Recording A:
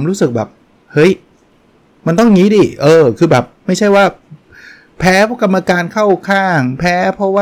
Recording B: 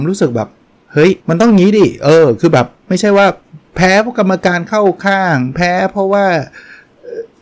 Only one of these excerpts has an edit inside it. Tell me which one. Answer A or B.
B